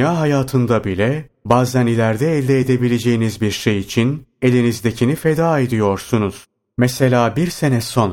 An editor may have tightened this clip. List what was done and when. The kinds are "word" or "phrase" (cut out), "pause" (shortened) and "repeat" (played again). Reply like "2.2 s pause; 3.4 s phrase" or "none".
none